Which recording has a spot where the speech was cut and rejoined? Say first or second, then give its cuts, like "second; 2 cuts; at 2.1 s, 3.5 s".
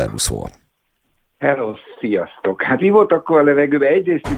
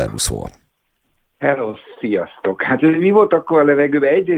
first; 1 cut; at 2.8 s